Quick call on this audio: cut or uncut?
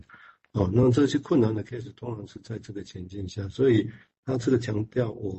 uncut